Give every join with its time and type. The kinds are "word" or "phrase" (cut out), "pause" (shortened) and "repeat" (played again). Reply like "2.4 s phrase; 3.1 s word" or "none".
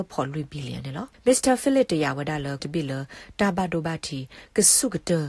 1.1 s pause; 2.6 s phrase